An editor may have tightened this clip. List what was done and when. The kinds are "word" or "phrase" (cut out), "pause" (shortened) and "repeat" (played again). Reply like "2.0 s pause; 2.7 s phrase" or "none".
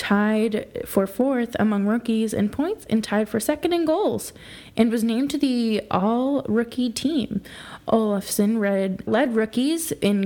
9.1 s word